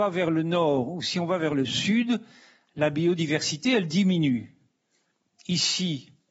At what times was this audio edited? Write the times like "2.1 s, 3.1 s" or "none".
none